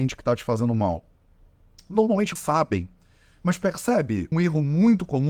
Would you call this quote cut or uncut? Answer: cut